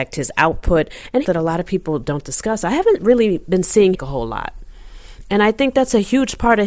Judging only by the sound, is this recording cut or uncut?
cut